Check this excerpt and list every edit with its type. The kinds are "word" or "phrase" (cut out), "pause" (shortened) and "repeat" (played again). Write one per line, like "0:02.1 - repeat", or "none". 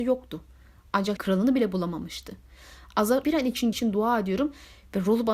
0:01.2 - word
0:03.2 - word
0:03.7 - word